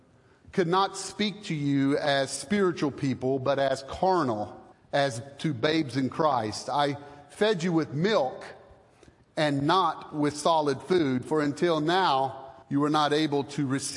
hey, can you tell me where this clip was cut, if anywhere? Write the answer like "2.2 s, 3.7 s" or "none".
4.7 s, 12.6 s